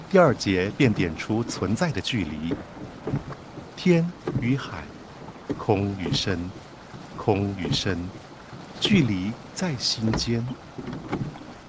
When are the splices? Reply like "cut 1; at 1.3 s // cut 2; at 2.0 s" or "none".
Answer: cut 1; at 7.1 s